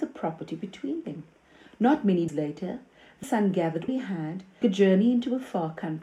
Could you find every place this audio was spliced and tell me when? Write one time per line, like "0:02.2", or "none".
0:02.3
0:03.2
0:03.9
0:04.6